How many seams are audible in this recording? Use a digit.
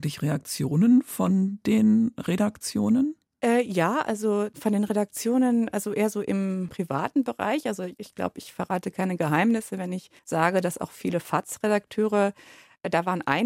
1